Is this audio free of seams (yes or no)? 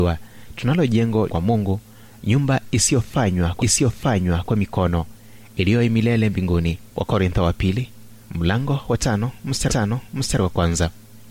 no